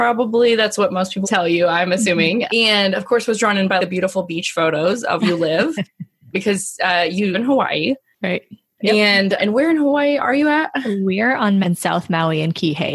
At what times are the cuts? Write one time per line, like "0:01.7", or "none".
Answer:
0:01.2
0:02.5
0:03.8
0:05.2
0:06.3
0:07.3
0:09.4
0:11.6